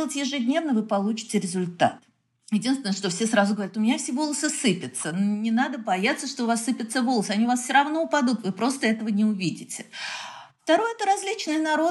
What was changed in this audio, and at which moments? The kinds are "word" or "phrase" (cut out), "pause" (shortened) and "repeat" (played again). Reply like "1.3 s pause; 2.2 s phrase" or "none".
none